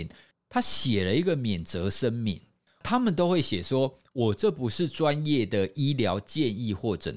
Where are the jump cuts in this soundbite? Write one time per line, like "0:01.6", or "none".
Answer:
none